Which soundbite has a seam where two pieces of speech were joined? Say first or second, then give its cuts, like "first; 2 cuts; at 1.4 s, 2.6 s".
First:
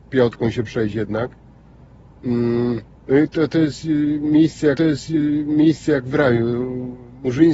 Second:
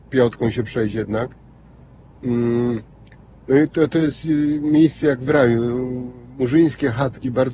first; 2 cuts; at 3.0 s, 4.8 s